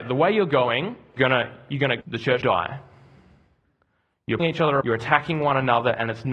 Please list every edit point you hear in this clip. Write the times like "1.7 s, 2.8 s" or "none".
1.2 s, 2.0 s, 2.4 s, 4.4 s, 4.8 s